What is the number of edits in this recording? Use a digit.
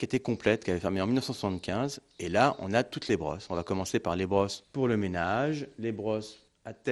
0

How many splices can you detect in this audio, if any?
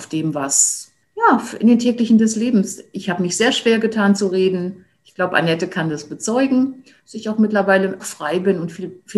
3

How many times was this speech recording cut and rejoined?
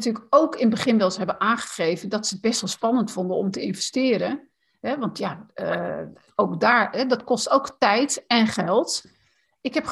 0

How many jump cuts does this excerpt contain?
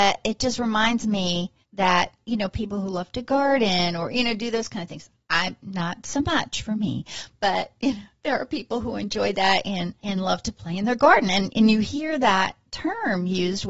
2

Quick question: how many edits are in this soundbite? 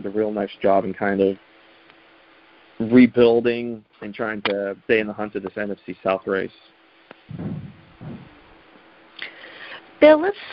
2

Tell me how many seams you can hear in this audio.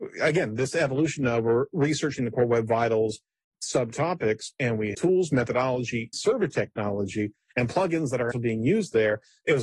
3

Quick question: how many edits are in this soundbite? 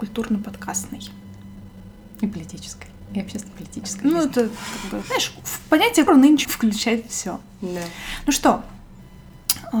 4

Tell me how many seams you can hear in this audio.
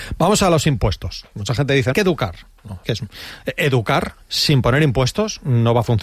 2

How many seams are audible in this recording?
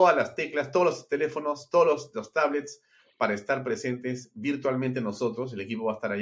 0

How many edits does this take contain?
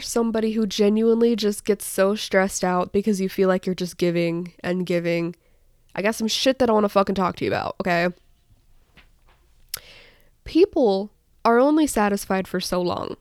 0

